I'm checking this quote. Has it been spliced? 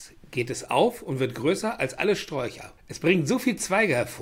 yes; 1 cut; at 2.8 s

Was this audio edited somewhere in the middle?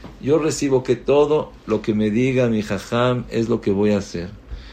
no; 0 cuts

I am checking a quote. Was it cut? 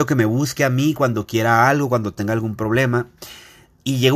no; 0 cuts

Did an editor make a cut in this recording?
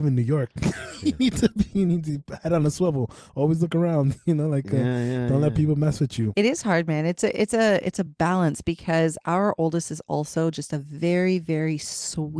no; 0 cuts

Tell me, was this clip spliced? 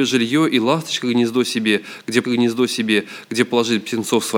yes; 1 cut; at 2.2 s

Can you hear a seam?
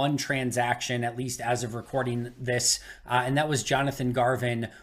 no; 0 cuts

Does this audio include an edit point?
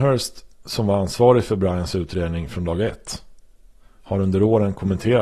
no; 0 cuts

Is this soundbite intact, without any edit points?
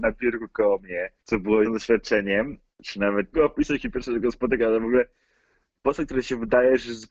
no; 4 cuts; at 1.2 s, 1.6 s, 2.7 s, 3.3 s

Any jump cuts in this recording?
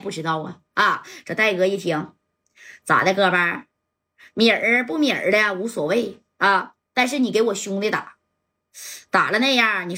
no; 0 cuts

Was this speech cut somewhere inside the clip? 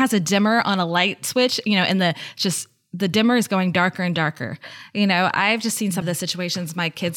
yes; 1 cut; at 6.0 s

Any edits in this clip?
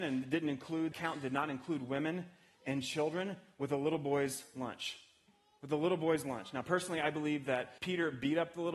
yes; 2 cuts; at 0.9 s, 7.8 s

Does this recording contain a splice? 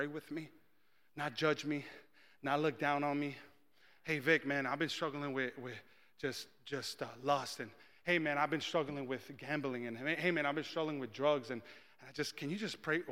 no; 0 cuts

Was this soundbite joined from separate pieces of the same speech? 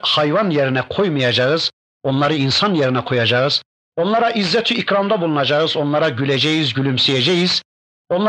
no; 0 cuts

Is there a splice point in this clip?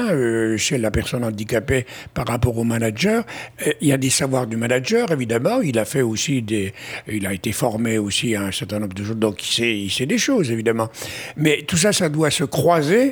no; 0 cuts

